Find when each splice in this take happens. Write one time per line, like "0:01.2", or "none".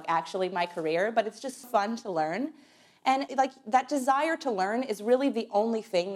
0:01.6
0:03.3